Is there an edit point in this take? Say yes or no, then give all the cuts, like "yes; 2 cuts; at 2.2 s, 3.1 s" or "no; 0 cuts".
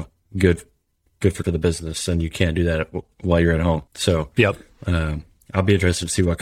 yes; 2 cuts; at 1.4 s, 3.9 s